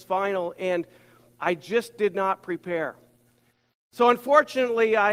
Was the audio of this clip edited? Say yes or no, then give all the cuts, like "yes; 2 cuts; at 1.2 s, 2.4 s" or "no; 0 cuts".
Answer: no; 0 cuts